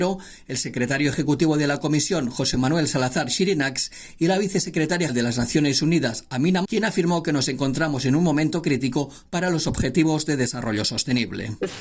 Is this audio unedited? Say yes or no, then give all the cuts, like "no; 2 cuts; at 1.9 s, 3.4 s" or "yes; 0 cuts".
no; 2 cuts; at 5.1 s, 6.6 s